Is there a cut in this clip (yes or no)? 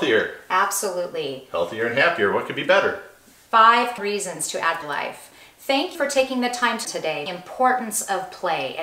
yes